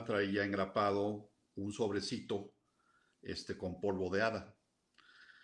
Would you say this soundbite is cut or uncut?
uncut